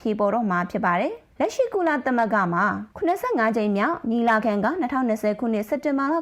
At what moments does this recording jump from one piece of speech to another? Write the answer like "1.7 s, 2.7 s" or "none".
1.3 s, 2.9 s